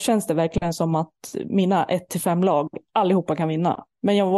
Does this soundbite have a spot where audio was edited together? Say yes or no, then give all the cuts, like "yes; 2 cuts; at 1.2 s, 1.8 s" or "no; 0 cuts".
no; 0 cuts